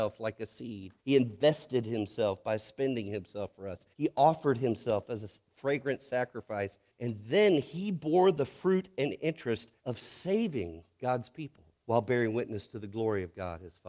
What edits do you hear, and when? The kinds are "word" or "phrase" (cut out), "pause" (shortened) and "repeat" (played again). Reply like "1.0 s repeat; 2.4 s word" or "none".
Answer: 1.0 s pause; 3.9 s pause; 6.9 s pause; 9.8 s pause; 11.7 s pause